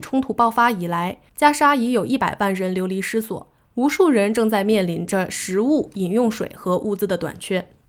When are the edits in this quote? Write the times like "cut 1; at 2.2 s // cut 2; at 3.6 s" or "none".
none